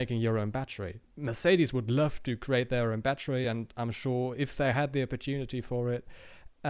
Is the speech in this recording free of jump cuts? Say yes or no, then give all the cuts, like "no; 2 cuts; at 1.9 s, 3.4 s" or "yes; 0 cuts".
yes; 0 cuts